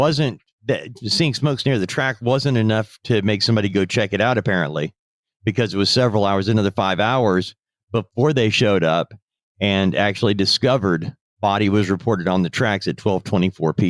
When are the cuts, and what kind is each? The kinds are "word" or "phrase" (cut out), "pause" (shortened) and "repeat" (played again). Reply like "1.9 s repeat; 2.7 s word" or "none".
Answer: none